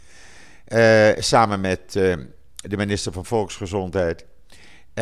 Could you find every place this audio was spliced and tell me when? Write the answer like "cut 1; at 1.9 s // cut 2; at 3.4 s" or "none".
none